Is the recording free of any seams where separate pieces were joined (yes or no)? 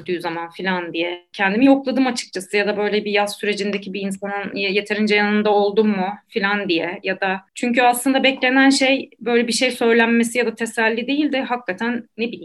yes